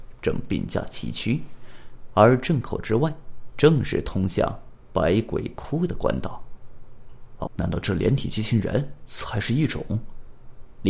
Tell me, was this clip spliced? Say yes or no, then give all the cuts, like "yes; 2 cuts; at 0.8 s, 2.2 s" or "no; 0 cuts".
yes; 1 cut; at 7.5 s